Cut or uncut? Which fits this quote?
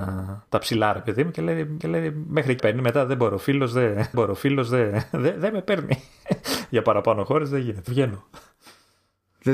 cut